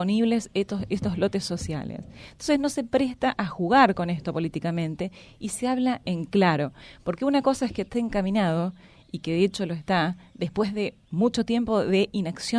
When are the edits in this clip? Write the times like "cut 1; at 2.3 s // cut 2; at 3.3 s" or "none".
none